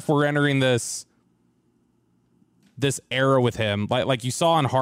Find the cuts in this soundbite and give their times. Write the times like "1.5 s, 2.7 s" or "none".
none